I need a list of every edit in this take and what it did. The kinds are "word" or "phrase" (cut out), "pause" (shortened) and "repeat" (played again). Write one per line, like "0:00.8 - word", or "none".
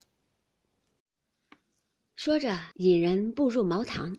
0:02.7 - pause